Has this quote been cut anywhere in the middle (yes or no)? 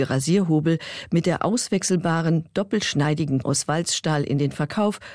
yes